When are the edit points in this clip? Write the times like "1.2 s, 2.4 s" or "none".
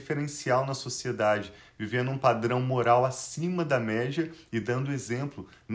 none